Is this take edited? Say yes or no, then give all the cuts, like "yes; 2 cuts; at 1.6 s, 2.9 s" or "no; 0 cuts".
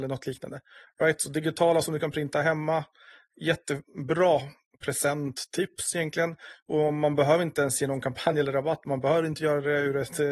no; 0 cuts